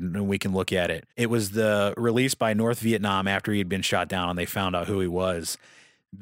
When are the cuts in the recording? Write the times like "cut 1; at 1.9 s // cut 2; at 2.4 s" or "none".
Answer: cut 1; at 1.1 s